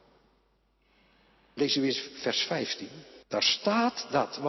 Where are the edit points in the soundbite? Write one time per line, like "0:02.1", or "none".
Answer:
0:03.2

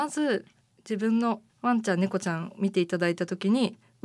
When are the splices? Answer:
0:01.5

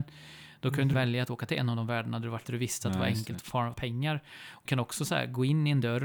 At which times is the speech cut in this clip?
0:00.9
0:01.5
0:02.4
0:03.7
0:04.7

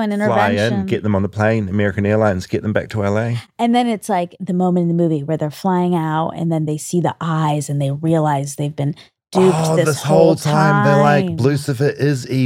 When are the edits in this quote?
none

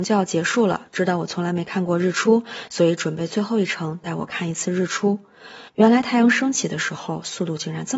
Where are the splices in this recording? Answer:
0:05.7

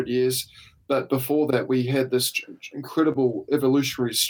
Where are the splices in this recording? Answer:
none

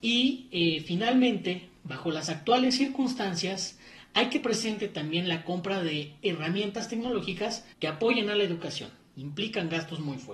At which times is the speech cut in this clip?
0:04.4
0:07.7
0:09.1

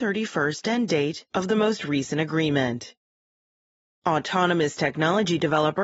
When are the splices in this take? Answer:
none

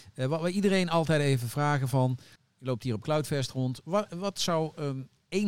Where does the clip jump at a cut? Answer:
0:02.3

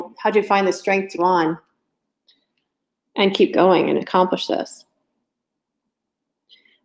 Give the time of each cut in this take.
0:01.2

